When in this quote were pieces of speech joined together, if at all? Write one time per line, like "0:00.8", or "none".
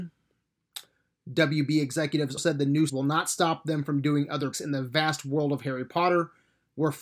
0:02.4
0:02.9
0:04.5